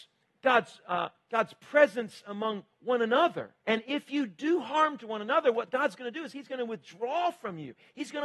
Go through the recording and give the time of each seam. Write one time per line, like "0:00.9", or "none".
0:03.6

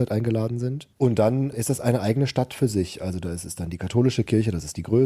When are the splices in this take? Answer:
0:00.9

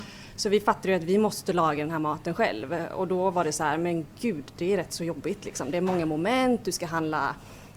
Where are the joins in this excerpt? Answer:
none

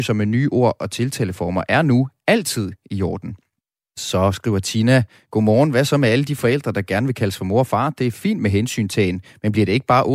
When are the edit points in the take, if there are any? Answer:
0:03.6

